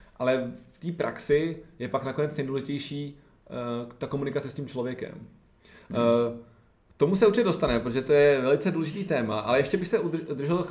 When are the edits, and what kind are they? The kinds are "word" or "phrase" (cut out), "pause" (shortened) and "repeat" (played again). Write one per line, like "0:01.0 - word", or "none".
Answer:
none

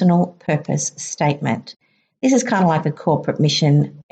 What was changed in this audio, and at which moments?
none

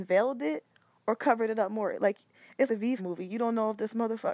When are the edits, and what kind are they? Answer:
0:02.7 - word
0:03.0 - phrase

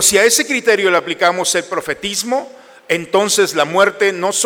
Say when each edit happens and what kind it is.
none

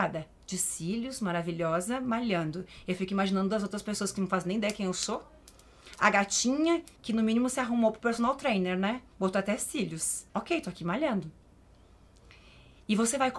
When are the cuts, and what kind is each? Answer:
0:07.0 - pause
0:10.3 - pause

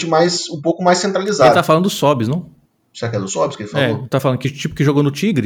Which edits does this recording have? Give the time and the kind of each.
none

